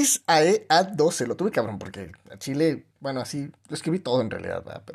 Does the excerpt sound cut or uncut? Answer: cut